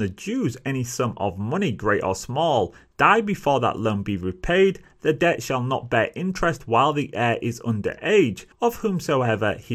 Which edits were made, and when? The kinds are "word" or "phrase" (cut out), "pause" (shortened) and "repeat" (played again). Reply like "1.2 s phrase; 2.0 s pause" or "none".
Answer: 8.5 s pause